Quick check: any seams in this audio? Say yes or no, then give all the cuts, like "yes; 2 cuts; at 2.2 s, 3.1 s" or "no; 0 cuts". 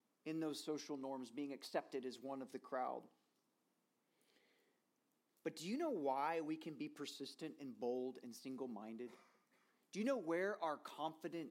no; 0 cuts